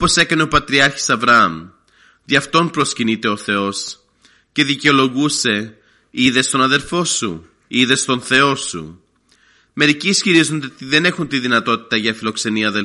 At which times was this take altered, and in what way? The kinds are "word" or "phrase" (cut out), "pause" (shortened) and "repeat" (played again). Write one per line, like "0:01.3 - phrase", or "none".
none